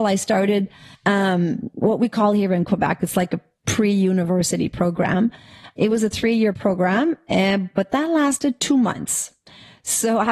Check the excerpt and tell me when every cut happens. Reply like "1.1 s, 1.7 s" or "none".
none